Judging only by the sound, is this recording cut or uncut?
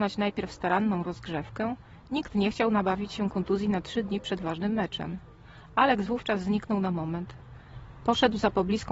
uncut